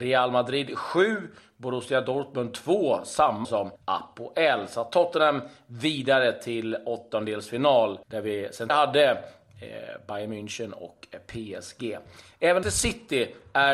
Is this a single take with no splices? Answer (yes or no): no